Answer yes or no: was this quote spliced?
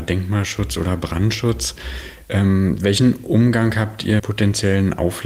yes